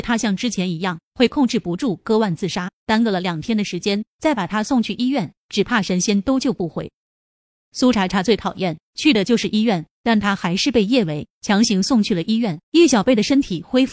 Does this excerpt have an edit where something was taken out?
yes; 1 cut; at 12.6 s

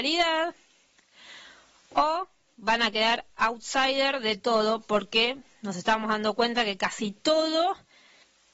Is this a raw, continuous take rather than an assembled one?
yes; 0 cuts

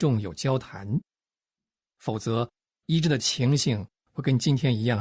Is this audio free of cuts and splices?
yes; 0 cuts

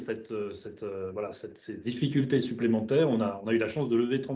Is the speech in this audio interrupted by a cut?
no; 0 cuts

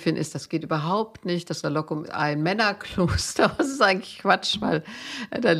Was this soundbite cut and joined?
yes; 3 cuts; at 1.6 s, 2.0 s, 3.6 s

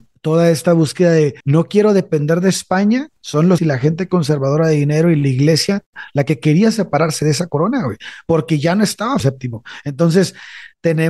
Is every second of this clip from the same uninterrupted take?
no; 4 cuts; at 1.4 s, 3.1 s, 3.6 s, 9.2 s

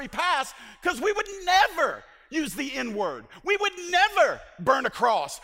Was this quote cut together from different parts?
no; 0 cuts

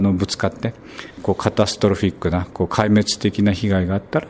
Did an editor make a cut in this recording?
yes; 1 cut; at 1.1 s

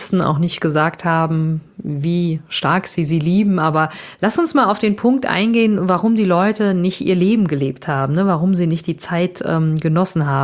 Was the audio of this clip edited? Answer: no; 0 cuts

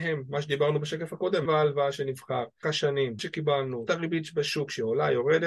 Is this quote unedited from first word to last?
no; 4 cuts; at 1.4 s, 2.6 s, 3.2 s, 3.9 s

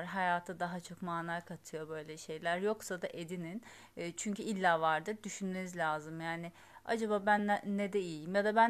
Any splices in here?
no; 0 cuts

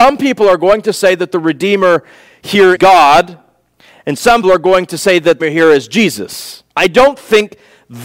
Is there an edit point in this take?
yes; 4 cuts; at 2.7 s, 4.4 s, 5.4 s, 6.7 s

